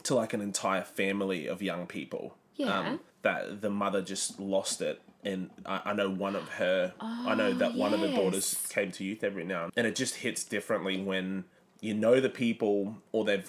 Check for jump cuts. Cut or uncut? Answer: cut